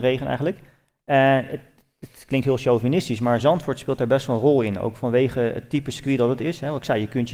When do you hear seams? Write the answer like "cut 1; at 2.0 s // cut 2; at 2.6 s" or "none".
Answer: none